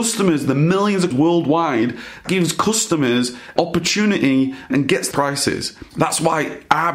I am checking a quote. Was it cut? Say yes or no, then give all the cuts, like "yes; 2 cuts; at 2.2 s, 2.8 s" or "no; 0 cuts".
yes; 6 cuts; at 1.1 s, 2.2 s, 3.6 s, 4.7 s, 5.1 s, 5.9 s